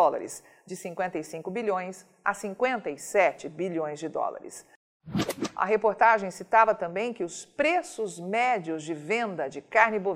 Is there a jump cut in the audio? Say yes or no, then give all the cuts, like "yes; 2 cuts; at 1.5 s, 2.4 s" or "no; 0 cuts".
no; 0 cuts